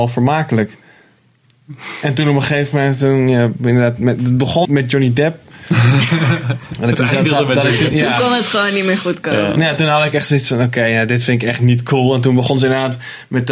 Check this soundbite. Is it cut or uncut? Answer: cut